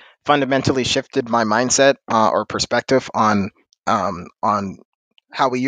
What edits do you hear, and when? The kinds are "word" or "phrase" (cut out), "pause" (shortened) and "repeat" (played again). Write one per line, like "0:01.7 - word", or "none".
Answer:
0:02.0 - pause
0:03.6 - pause